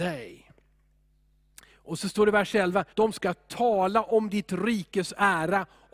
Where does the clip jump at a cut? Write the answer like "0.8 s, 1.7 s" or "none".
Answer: 2.9 s